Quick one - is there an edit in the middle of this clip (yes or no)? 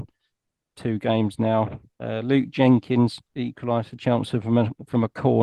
yes